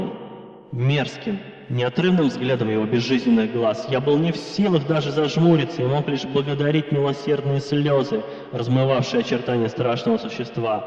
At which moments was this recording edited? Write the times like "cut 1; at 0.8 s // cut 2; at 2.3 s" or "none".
none